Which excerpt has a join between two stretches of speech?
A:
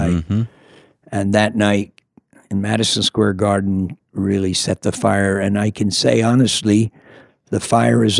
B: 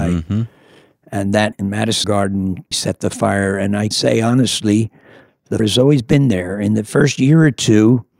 B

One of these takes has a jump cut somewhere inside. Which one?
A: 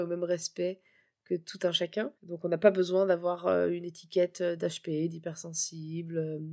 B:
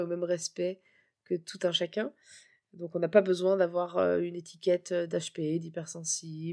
A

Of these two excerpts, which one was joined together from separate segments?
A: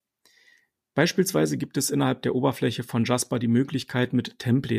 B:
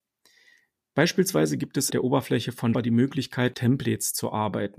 B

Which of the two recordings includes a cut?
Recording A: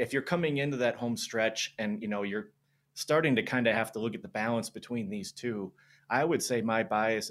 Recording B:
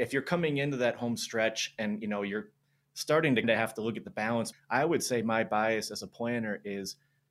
B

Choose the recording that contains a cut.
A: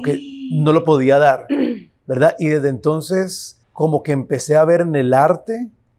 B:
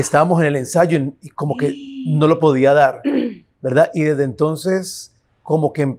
A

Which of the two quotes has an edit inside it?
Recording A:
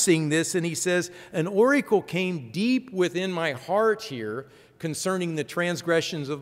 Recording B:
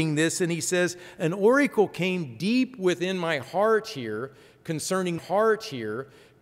B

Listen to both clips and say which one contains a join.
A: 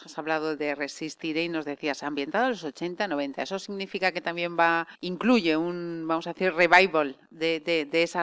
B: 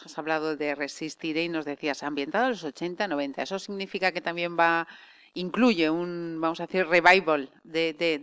A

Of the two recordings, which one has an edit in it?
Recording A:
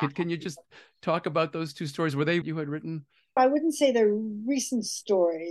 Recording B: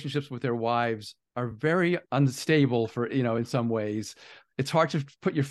A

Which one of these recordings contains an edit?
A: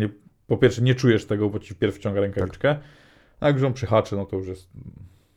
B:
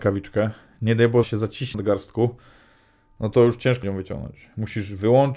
B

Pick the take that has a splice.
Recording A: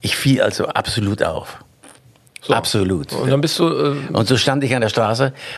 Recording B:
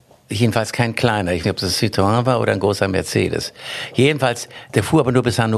B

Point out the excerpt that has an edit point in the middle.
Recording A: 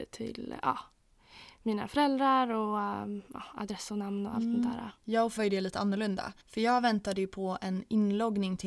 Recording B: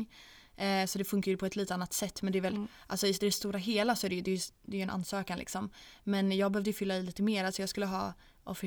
A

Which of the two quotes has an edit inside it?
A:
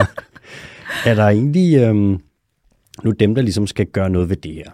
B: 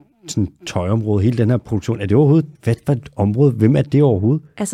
B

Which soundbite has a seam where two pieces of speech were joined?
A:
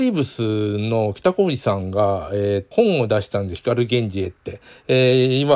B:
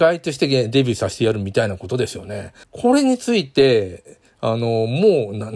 A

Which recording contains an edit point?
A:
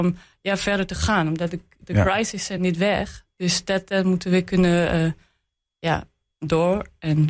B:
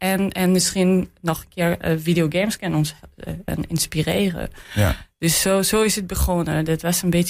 B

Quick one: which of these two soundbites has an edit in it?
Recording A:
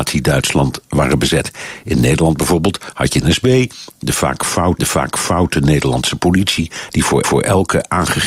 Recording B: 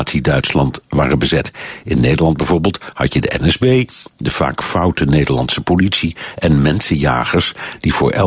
A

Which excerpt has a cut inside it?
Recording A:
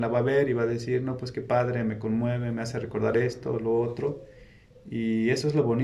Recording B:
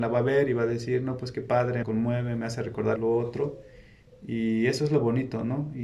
B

